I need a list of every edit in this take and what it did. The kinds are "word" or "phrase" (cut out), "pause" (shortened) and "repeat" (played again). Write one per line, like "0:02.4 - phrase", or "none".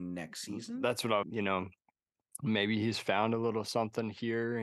0:01.2 - phrase